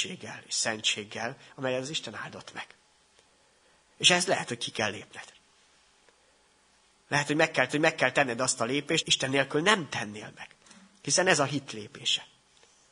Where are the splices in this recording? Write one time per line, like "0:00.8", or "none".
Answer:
0:07.7
0:09.0